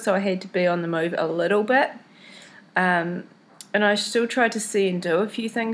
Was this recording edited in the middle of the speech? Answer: no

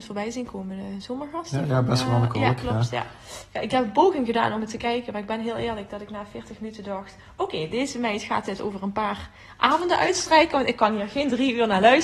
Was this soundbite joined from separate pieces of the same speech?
no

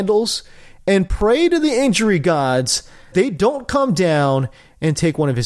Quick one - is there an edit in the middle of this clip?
yes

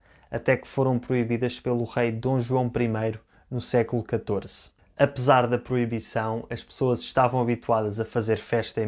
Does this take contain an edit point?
no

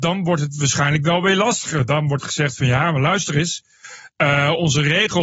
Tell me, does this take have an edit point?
no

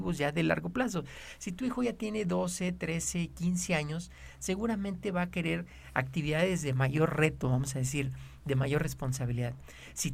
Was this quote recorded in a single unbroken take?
yes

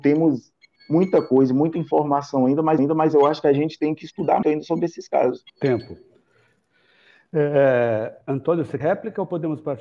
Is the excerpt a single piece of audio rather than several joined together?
no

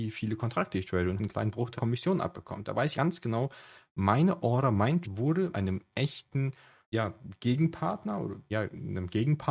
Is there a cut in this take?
yes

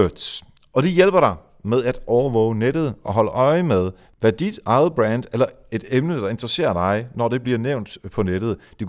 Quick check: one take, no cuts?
yes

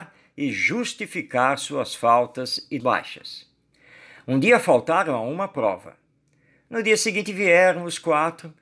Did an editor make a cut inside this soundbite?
yes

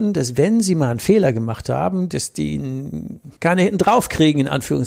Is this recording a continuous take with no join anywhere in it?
no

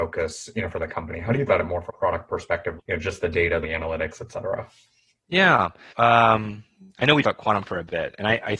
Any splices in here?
yes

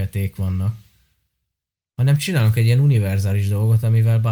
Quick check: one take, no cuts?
yes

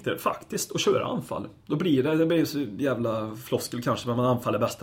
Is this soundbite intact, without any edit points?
yes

